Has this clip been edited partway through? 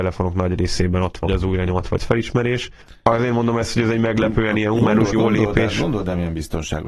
yes; 3 cuts; at 1.3 s, 2.0 s, 5.1 s

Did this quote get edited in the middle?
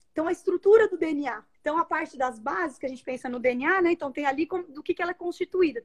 no; 0 cuts

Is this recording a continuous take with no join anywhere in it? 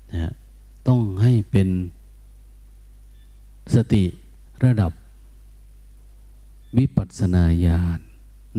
no; 1 cut; at 4.5 s

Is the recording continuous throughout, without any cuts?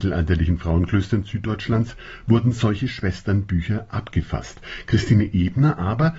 yes; 0 cuts

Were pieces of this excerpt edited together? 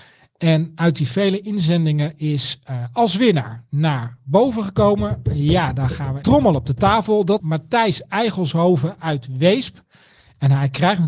yes; 2 cuts; at 6.2 s, 7.4 s

